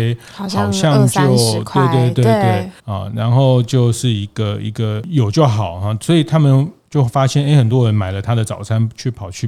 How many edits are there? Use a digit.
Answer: 1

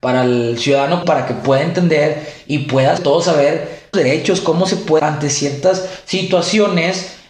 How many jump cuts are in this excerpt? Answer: 4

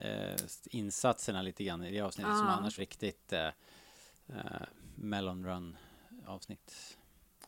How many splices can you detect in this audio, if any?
1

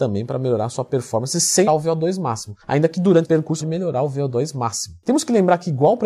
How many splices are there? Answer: 4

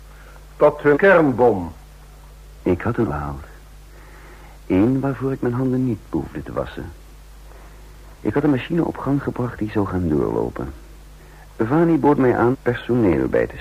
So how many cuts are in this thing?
6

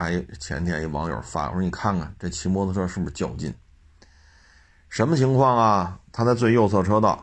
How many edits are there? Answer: 0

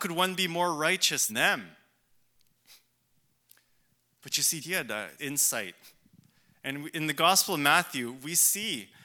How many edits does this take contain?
3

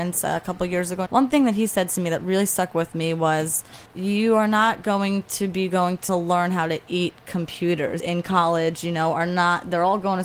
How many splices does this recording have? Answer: 4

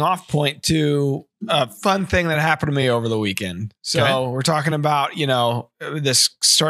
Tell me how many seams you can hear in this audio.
0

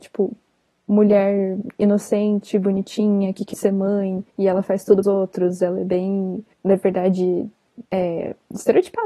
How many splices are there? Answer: 5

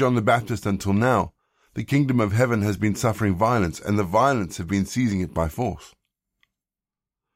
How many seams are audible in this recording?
0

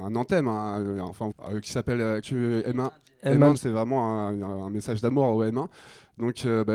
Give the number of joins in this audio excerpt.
3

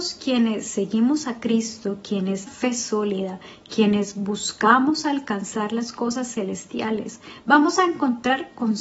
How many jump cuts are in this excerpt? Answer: 1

